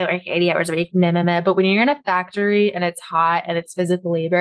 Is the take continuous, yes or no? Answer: yes